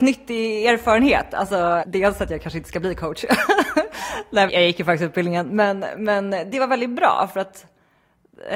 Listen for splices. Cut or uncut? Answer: cut